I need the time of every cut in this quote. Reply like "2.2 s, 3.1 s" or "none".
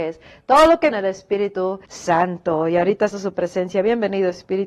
0.9 s, 1.9 s, 3.1 s